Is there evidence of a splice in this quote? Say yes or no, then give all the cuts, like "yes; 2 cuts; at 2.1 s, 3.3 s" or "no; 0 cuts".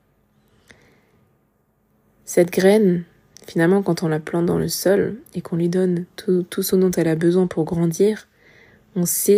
no; 0 cuts